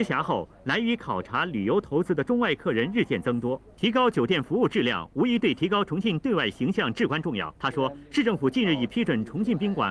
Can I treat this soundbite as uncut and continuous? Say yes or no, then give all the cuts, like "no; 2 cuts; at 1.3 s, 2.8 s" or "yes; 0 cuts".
no; 2 cuts; at 3.7 s, 7.6 s